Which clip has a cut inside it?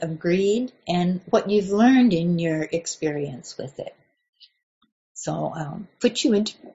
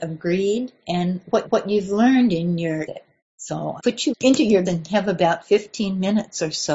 second; 6 cuts; at 1.4 s, 2.8 s, 3.2 s, 3.8 s, 4.1 s, 4.7 s

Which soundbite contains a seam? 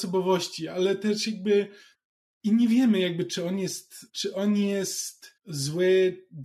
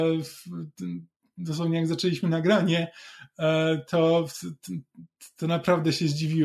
first; 3 cuts; at 1.9 s, 4.1 s, 5.4 s

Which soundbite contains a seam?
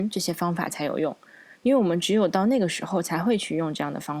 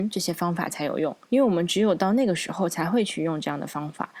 second; 1 cut; at 1.2 s

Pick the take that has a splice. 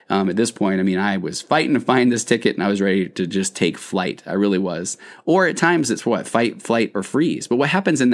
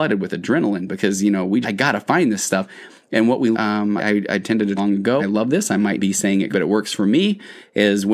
second; 7 cuts; at 1.6 s, 3.5 s, 4.0 s, 4.8 s, 5.2 s, 6.0 s, 6.5 s

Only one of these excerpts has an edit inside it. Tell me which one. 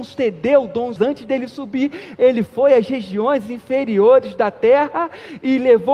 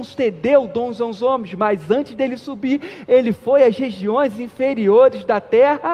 first; 1 cut; at 1.0 s

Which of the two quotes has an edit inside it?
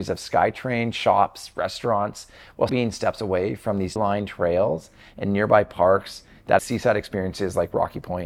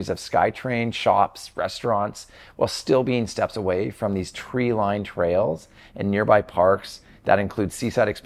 first; 3 cuts; at 2.7 s, 4.0 s, 6.6 s

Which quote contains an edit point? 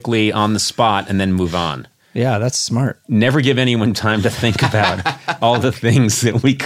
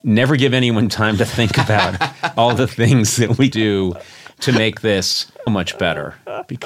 second; 2 cuts; at 3.5 s, 5.5 s

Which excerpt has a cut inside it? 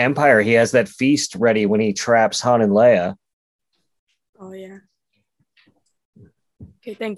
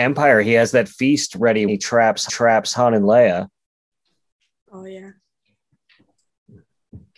second; 2 cuts; at 1.7 s, 2.3 s

